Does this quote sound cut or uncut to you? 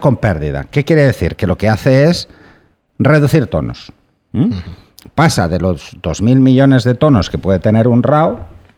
uncut